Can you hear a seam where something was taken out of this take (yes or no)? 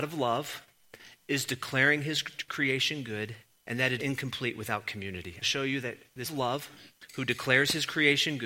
yes